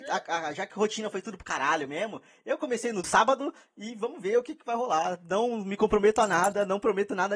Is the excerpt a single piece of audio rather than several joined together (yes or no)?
no